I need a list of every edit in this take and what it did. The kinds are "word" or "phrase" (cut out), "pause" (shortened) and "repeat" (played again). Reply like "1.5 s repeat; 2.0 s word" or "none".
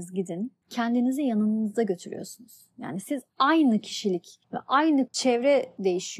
4.4 s pause; 5.1 s word